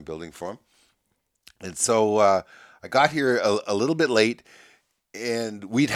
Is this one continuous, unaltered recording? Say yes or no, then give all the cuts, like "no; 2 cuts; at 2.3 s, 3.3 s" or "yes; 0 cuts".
yes; 0 cuts